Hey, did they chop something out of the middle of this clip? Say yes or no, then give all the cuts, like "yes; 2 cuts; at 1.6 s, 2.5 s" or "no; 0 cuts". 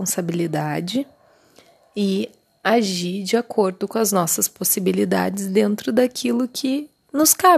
no; 0 cuts